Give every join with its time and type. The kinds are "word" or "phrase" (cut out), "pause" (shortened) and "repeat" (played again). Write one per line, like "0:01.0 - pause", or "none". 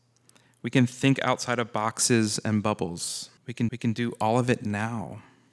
0:03.4 - pause
0:03.7 - repeat